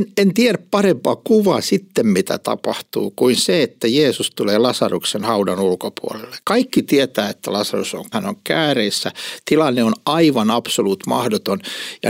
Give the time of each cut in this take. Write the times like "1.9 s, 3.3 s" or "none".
6.4 s, 8.1 s